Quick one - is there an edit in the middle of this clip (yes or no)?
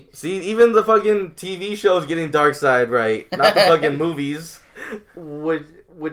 no